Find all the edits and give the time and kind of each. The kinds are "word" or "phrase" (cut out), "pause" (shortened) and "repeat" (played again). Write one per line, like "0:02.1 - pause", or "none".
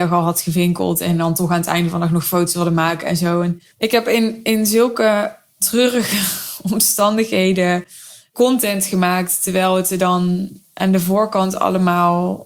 0:03.7 - pause